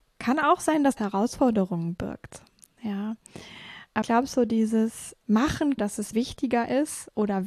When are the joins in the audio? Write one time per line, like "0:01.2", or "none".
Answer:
0:01.0
0:04.0
0:05.8
0:06.1